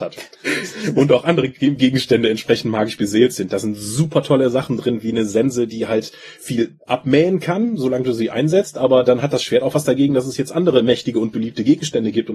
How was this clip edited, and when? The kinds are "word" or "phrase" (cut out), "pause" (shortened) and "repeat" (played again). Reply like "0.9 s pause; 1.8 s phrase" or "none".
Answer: none